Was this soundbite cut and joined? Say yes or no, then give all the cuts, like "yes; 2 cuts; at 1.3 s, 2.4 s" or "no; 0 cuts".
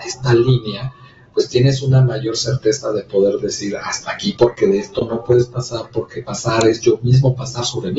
no; 0 cuts